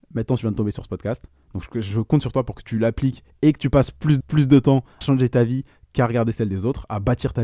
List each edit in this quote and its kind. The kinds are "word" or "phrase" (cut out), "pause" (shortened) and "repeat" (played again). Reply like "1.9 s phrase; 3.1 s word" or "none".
4.2 s repeat; 5.0 s word

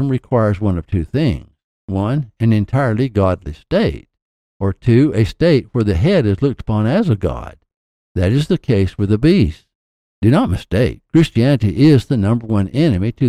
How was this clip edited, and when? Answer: none

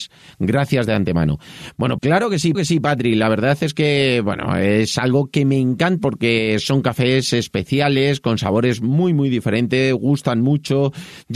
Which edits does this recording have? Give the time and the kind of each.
2.0 s word; 2.5 s repeat; 6.0 s word

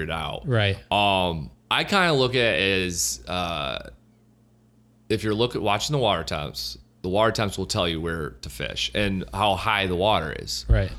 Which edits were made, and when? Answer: none

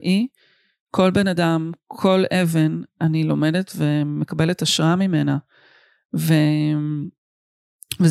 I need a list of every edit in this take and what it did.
none

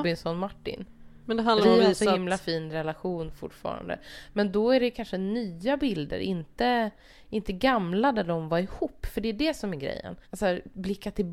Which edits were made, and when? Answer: 1.2 s pause; 1.6 s phrase; 10.2 s pause

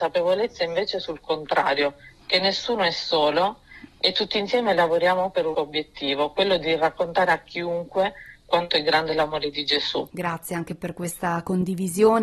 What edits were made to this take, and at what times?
5.5 s word

